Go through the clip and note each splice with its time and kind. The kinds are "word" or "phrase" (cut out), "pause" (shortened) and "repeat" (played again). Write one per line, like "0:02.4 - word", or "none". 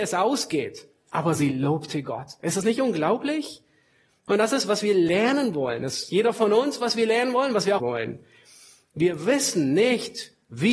0:07.8 - phrase

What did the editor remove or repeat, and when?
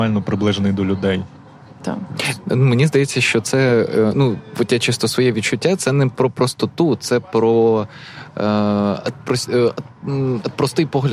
none

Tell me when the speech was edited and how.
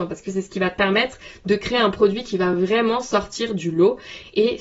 none

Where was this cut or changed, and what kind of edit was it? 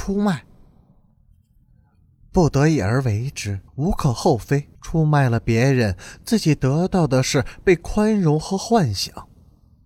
0:03.7 - pause
0:04.8 - pause

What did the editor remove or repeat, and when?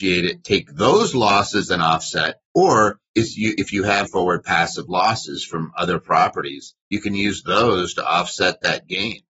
0:04.1 - phrase

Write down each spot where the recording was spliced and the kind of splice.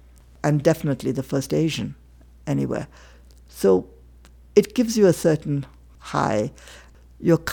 none

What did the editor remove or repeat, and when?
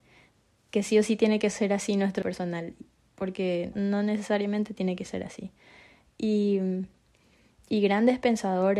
0:02.2 - word
0:03.7 - word

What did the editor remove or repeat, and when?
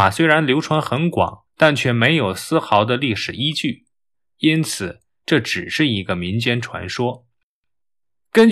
0:01.5 - pause

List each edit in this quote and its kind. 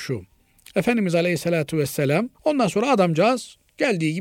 0:02.3 - pause

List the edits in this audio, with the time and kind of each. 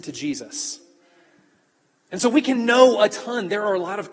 none

